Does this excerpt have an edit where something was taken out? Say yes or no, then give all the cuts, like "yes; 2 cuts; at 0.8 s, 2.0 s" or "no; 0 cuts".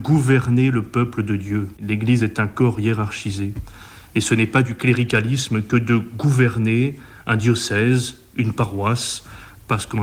no; 0 cuts